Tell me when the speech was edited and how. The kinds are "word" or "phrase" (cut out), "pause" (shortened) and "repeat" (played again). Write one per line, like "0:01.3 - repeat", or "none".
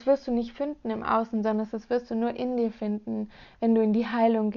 none